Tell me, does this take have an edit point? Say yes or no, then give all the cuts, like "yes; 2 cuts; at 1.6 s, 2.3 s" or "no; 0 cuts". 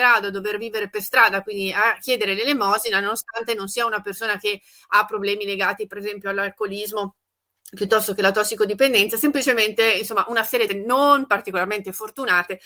yes; 1 cut; at 10.7 s